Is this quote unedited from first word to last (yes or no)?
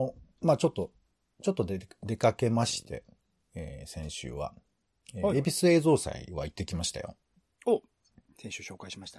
yes